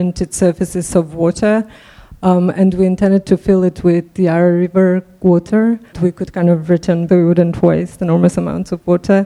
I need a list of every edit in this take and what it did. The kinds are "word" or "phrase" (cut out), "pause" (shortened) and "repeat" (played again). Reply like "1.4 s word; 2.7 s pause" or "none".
5.9 s word; 7.1 s phrase